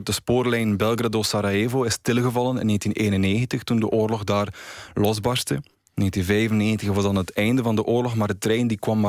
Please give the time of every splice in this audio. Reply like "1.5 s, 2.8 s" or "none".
none